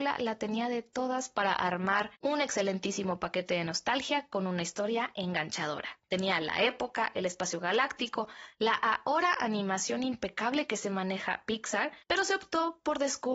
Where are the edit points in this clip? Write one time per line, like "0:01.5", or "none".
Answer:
0:02.1
0:12.0